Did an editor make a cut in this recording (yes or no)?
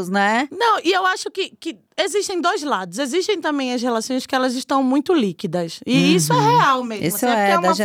no